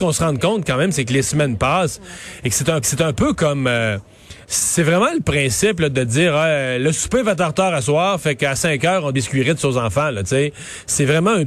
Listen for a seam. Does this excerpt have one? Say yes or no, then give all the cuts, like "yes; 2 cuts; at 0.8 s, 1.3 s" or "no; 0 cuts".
yes; 3 cuts; at 2.8 s, 4.4 s, 9.1 s